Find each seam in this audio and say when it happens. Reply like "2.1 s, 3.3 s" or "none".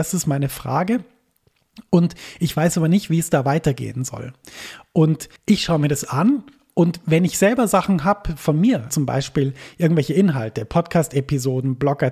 5.4 s, 8.9 s